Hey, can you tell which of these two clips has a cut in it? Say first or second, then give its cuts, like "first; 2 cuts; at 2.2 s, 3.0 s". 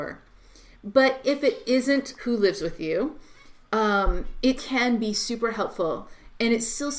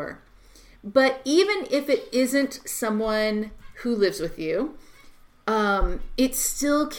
first; 4 cuts; at 1.2 s, 2.2 s, 3.6 s, 4.6 s